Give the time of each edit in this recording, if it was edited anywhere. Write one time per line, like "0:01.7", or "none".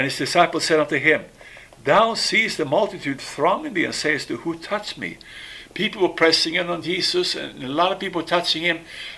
none

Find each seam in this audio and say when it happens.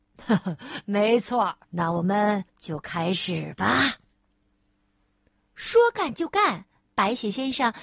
0:01.6
0:02.5
0:04.3
0:06.8

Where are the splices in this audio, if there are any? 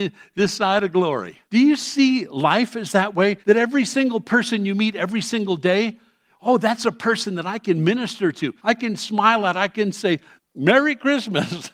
0:01.4
0:03.4
0:08.6
0:10.4

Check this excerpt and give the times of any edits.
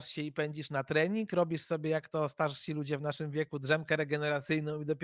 none

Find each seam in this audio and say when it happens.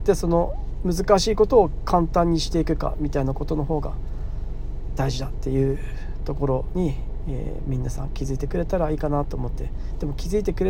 none

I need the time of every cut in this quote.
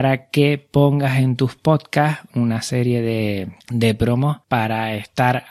0:02.3
0:03.6
0:04.4

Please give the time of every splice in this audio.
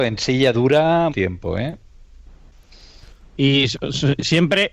0:01.1

